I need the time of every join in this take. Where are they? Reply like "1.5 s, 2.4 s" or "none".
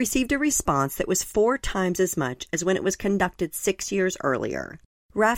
none